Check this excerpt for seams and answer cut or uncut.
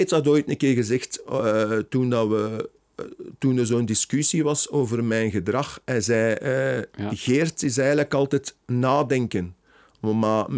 cut